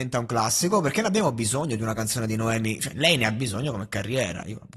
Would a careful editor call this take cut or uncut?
uncut